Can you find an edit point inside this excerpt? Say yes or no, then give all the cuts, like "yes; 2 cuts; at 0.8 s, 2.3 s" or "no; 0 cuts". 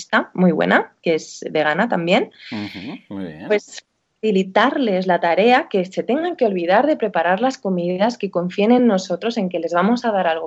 no; 0 cuts